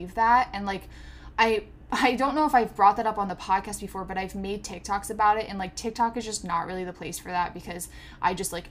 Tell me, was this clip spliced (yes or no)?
no